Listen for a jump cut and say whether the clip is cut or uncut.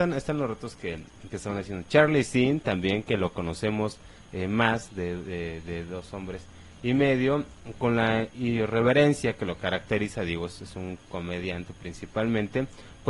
uncut